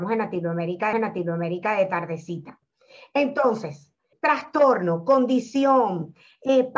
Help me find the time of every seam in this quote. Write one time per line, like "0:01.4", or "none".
0:00.9
0:04.1